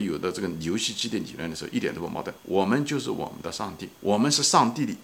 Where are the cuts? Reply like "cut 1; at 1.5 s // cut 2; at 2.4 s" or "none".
cut 1; at 2.4 s // cut 2; at 4.0 s